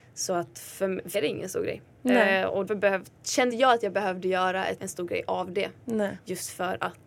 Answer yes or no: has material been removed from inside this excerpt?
yes